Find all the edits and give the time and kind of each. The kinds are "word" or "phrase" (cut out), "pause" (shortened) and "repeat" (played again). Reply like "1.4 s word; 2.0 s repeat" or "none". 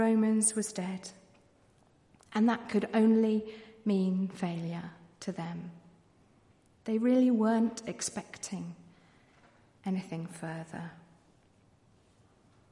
none